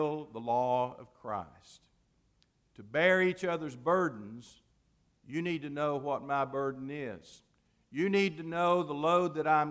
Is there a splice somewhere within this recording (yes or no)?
no